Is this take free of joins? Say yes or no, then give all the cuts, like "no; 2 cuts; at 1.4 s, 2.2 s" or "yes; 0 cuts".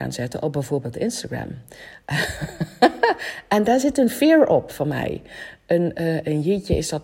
yes; 0 cuts